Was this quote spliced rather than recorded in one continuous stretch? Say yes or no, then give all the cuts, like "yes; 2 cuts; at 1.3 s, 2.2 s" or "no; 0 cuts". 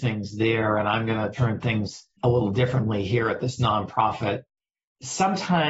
no; 0 cuts